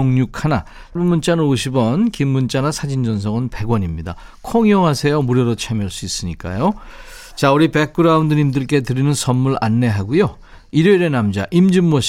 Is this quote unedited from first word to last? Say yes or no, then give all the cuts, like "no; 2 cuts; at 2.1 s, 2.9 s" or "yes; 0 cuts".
no; 1 cut; at 1.0 s